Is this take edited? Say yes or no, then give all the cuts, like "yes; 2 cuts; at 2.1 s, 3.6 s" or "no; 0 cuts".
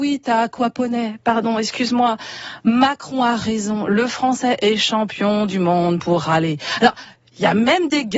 no; 0 cuts